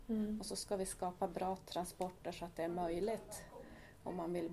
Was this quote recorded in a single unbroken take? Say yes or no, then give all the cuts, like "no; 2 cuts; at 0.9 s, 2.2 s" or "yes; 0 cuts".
yes; 0 cuts